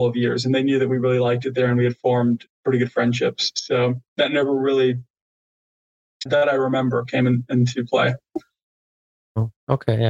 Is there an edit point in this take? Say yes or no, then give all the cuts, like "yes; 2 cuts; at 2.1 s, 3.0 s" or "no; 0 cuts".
yes; 1 cut; at 6.3 s